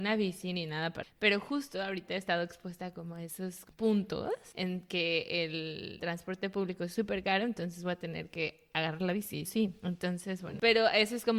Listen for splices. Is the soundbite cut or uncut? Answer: cut